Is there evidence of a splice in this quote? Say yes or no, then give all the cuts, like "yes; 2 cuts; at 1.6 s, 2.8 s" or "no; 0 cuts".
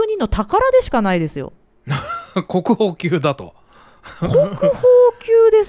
no; 0 cuts